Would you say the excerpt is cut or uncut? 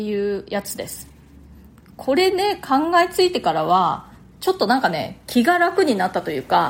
uncut